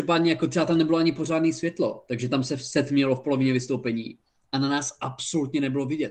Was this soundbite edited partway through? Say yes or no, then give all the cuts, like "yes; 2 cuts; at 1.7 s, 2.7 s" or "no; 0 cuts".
no; 0 cuts